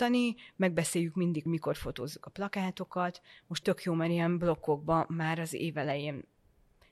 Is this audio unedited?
no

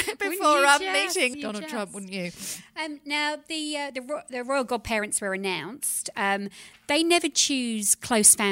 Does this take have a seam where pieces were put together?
yes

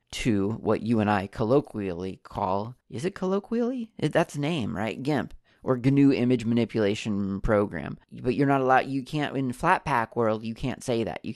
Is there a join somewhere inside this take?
yes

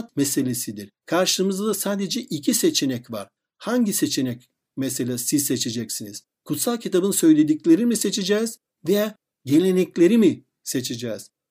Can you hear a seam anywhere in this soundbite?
no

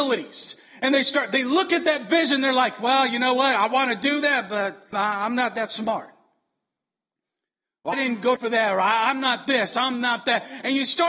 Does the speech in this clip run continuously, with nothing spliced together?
no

